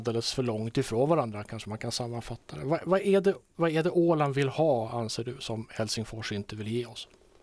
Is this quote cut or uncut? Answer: uncut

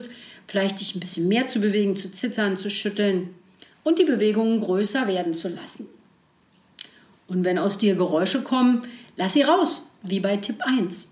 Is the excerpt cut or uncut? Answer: uncut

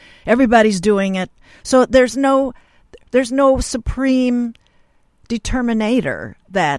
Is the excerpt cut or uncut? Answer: uncut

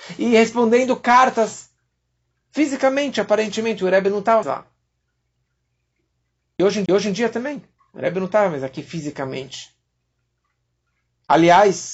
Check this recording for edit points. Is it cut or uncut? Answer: cut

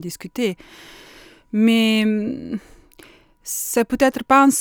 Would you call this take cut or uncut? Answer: uncut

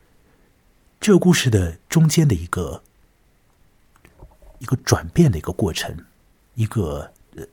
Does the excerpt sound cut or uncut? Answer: uncut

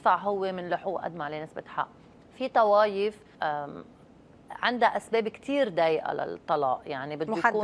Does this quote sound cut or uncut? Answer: cut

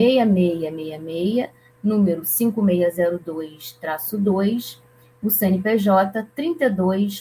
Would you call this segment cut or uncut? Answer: uncut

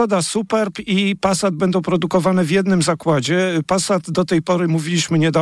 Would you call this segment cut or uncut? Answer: uncut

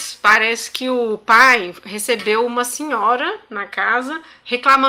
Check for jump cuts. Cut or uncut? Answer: uncut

